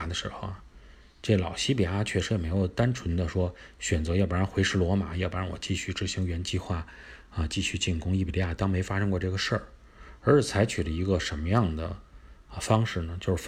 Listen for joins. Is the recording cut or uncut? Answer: uncut